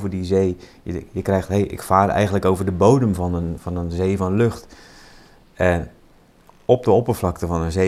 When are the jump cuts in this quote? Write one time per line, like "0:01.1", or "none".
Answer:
none